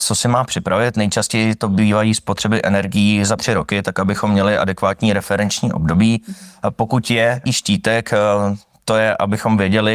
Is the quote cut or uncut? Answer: cut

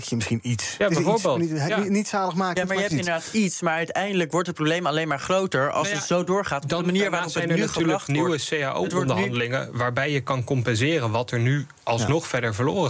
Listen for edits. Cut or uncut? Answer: uncut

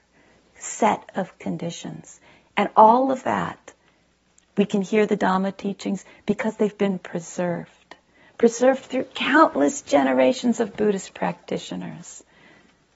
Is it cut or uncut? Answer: uncut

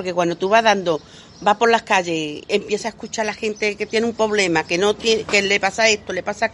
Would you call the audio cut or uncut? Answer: uncut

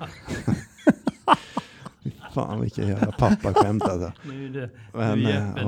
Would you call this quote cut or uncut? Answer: uncut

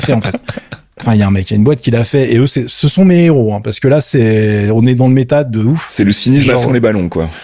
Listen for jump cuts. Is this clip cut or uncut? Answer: uncut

